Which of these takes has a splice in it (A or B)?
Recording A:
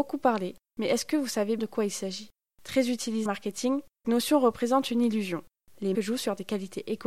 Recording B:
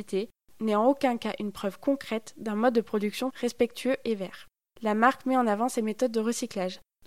A